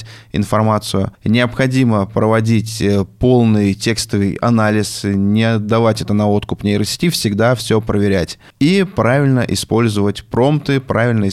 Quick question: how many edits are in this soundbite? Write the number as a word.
one